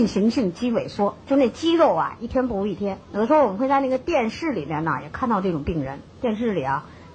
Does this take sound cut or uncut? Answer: cut